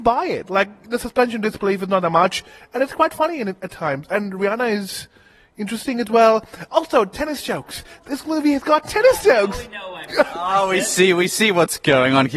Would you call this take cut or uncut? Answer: uncut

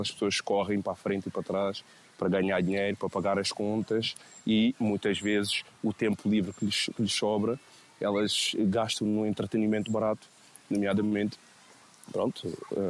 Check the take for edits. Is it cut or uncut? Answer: uncut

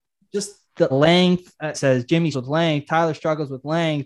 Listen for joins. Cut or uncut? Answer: cut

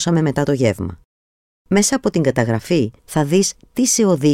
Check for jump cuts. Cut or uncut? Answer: cut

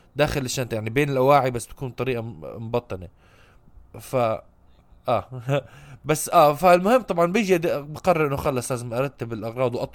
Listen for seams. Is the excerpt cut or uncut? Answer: uncut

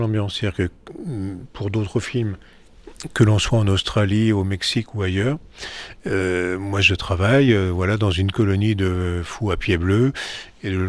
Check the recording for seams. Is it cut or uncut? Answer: uncut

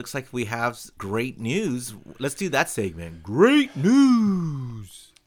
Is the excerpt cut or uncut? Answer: cut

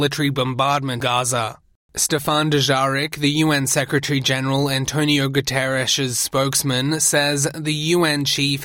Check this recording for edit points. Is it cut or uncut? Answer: cut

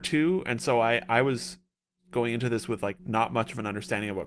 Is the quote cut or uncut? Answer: cut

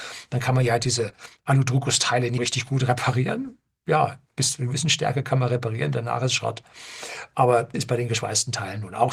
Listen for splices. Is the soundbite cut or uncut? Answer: cut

